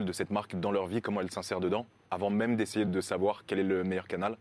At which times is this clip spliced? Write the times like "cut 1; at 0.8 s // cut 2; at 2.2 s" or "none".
cut 1; at 2.9 s